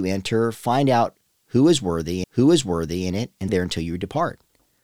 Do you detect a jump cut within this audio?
yes; 2 cuts; at 2.2 s, 3.5 s

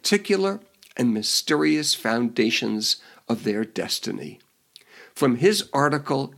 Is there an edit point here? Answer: no; 0 cuts

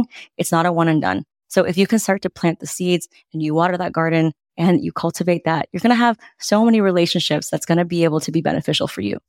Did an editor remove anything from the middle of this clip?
no; 0 cuts

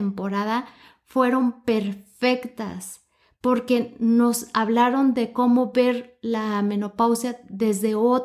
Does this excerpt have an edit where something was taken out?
no; 0 cuts

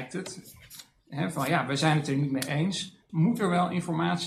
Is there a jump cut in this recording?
yes; 1 cut; at 3.1 s

